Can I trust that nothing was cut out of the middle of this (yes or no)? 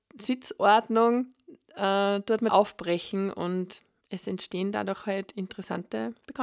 no